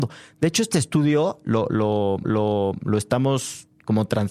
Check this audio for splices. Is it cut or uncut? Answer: cut